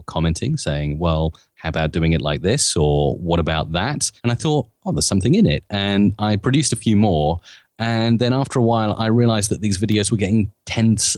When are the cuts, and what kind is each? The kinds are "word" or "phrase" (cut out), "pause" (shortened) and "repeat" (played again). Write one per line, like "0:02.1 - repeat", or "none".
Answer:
0:04.2 - pause